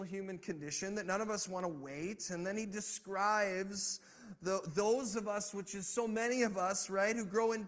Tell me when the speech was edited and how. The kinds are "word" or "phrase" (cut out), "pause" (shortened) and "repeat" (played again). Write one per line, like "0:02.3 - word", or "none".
none